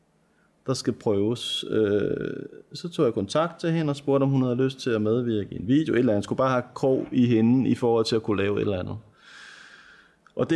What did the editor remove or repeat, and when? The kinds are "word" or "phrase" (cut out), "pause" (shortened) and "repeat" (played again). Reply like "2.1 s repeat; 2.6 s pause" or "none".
none